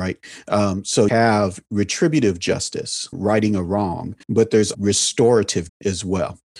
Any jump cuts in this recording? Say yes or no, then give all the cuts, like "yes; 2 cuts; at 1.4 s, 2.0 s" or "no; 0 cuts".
yes; 5 cuts; at 1.1 s, 3.1 s, 4.2 s, 4.7 s, 5.7 s